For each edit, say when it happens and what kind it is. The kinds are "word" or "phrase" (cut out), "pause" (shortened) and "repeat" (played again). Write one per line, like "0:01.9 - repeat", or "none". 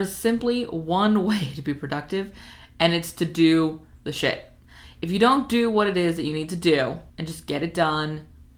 0:07.1 - pause